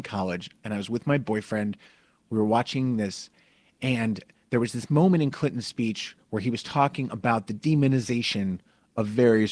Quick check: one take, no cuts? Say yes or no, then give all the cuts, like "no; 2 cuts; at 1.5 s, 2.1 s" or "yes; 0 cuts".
yes; 0 cuts